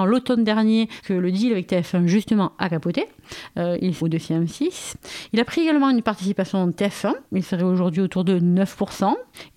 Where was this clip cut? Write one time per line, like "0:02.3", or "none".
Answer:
0:01.0
0:04.0